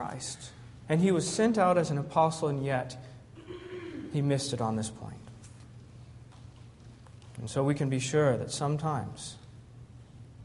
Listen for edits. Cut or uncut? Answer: uncut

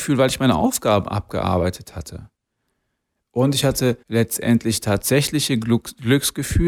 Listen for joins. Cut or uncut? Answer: cut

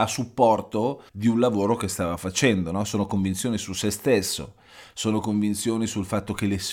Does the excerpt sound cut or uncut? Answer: cut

